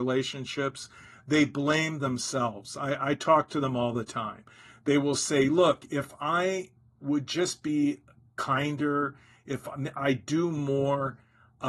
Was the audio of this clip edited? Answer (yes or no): no